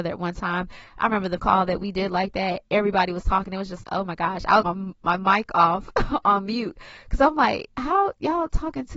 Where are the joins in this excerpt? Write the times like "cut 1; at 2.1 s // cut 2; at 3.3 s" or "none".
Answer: cut 1; at 1.4 s // cut 2; at 3.8 s // cut 3; at 4.6 s